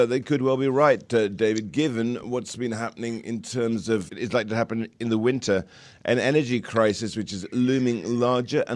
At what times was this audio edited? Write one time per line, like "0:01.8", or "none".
0:04.1